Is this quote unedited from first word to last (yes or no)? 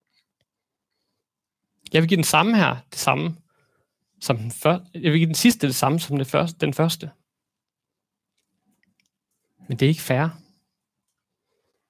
yes